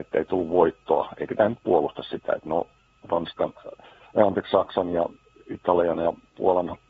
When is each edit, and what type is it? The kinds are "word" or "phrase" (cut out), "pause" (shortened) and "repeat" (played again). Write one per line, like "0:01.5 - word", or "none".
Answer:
none